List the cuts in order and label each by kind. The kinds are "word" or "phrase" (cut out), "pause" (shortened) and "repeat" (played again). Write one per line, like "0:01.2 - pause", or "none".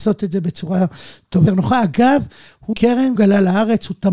0:01.5 - word
0:02.7 - word
0:03.2 - word